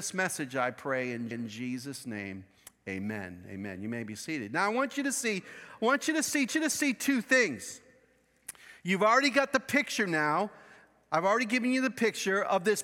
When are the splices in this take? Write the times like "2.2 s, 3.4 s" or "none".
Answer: 1.3 s, 6.5 s